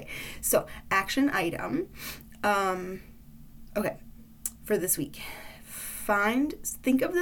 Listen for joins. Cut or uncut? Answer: uncut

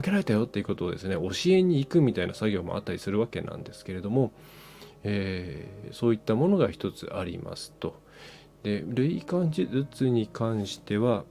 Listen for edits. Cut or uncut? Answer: uncut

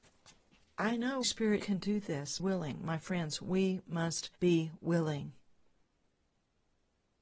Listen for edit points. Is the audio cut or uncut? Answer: cut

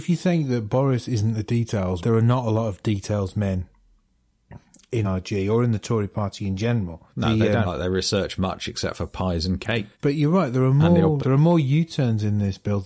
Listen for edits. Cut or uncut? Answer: cut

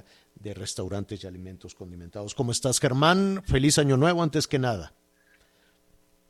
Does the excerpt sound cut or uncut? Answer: uncut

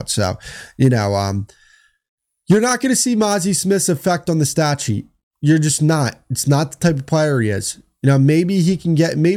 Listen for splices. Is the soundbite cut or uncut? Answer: uncut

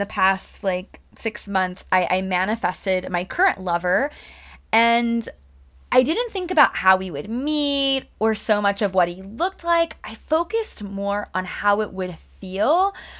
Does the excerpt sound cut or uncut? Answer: uncut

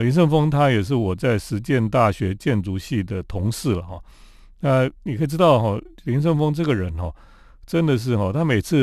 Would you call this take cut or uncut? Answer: uncut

